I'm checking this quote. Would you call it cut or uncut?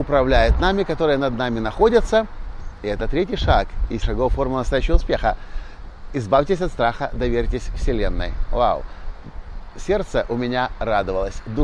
cut